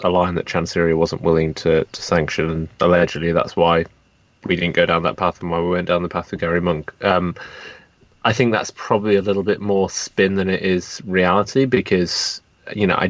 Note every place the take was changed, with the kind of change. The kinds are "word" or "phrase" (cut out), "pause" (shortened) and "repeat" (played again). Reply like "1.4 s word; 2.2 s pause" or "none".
none